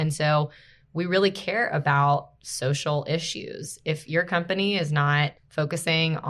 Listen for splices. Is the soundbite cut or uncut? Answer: cut